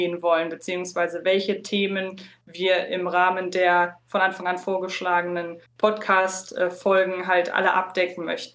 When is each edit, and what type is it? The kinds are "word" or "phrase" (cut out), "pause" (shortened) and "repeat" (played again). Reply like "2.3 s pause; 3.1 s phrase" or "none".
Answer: 5.7 s pause

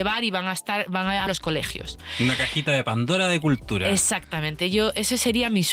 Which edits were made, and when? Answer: 1.3 s phrase

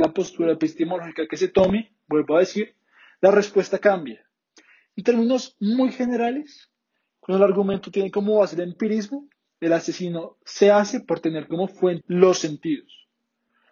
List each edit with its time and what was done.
12.0 s phrase

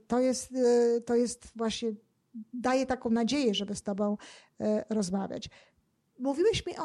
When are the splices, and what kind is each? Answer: none

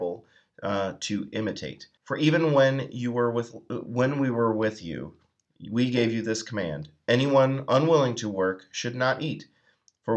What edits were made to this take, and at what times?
2.0 s pause

